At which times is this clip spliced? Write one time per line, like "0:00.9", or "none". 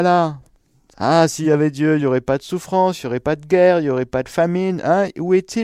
none